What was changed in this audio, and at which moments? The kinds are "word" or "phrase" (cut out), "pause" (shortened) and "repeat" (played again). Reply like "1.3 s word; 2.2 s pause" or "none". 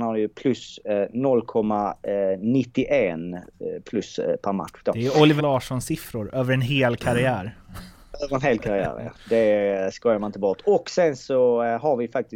5.4 s word

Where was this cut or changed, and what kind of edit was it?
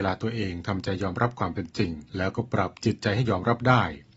2.1 s pause

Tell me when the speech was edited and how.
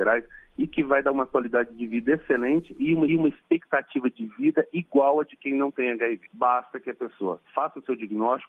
3.1 s repeat; 6.3 s pause; 7.4 s pause

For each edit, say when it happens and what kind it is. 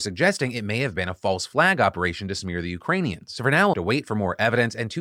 3.7 s word

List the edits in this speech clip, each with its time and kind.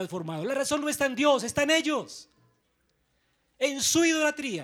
none

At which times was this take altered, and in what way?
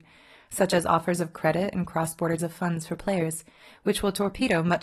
2.4 s word

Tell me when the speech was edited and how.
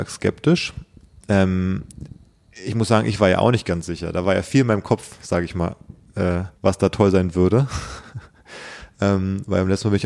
6.6 s pause

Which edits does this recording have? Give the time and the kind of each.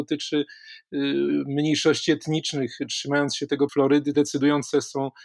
3.7 s word; 4.1 s word

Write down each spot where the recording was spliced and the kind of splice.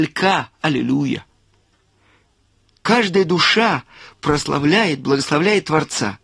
none

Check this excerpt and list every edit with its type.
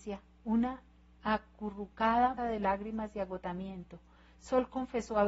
2.4 s word

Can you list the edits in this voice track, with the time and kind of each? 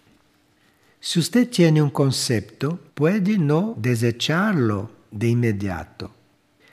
2.9 s pause

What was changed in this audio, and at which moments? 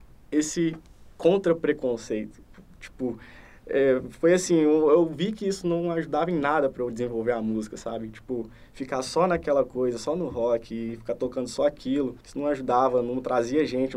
12.2 s pause

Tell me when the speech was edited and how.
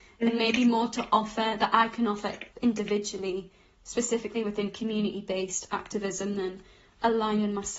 2.5 s pause

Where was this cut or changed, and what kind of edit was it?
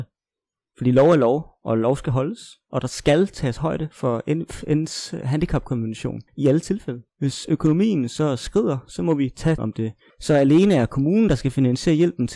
6.3 s pause; 7.1 s pause; 9.6 s word; 10.1 s pause

